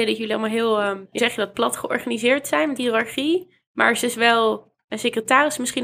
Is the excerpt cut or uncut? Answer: cut